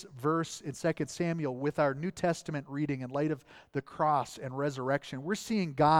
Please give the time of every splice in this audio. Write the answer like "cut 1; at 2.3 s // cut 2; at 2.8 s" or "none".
none